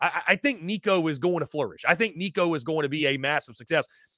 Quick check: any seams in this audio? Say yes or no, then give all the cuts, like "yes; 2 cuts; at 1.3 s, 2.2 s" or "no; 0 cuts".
no; 0 cuts